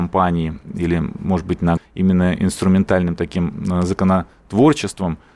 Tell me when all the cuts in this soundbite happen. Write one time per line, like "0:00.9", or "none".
0:01.8

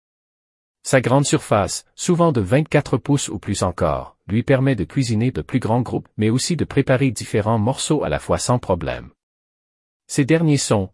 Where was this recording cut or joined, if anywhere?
0:05.3
0:06.1

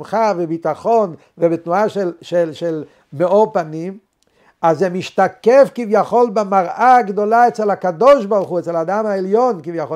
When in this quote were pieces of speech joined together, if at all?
none

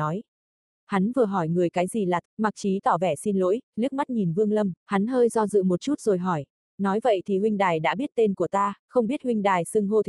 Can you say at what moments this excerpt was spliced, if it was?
0:02.2
0:04.8
0:08.8

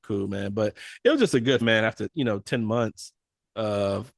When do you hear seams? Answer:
0:01.6

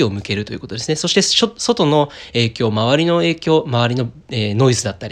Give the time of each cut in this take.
none

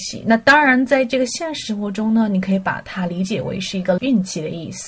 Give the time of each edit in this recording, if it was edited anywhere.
0:04.0

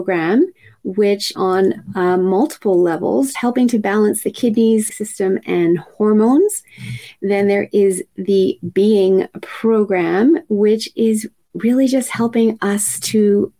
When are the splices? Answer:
0:01.3
0:03.3
0:04.9

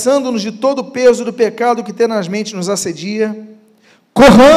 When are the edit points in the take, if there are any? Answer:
none

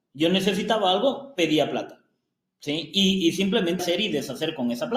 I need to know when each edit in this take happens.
0:03.8

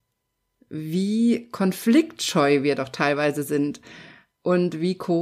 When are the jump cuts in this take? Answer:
none

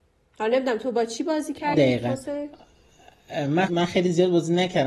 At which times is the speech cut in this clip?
0:01.7
0:03.7

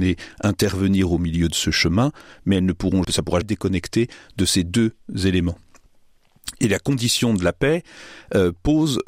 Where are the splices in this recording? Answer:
0:03.0
0:03.4

